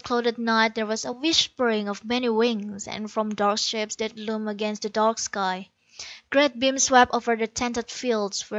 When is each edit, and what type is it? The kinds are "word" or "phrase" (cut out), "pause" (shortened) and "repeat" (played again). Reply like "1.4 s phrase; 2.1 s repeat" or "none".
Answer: none